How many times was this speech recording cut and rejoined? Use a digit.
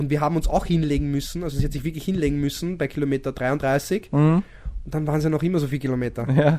0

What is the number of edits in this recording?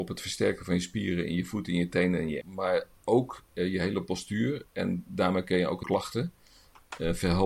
2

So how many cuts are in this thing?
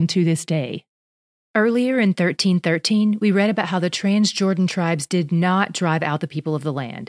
0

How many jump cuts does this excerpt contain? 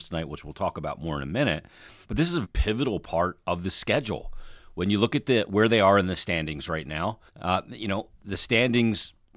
3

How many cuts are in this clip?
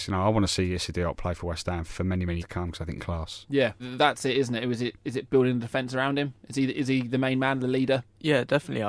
4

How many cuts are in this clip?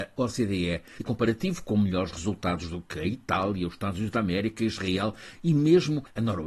1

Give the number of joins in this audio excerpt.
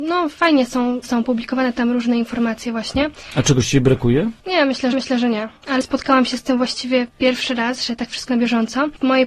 5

